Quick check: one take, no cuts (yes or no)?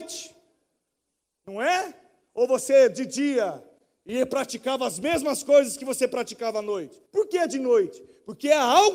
no